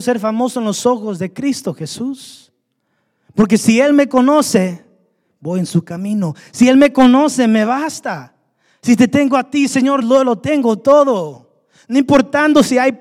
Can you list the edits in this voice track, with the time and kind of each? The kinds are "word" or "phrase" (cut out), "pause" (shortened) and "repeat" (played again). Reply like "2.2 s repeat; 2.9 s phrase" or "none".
none